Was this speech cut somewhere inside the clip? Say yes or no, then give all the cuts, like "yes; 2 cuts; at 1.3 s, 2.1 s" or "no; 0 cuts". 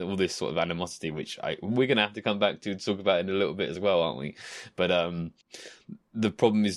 no; 0 cuts